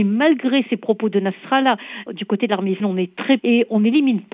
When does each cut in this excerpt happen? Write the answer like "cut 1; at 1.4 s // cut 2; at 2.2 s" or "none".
cut 1; at 2.1 s // cut 2; at 2.8 s // cut 3; at 3.4 s